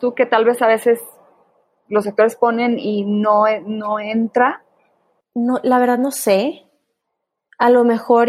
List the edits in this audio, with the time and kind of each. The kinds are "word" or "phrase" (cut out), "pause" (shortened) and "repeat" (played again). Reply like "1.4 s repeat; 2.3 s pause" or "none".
none